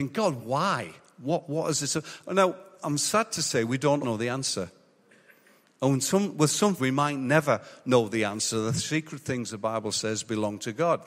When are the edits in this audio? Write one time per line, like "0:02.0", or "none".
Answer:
0:04.0
0:06.8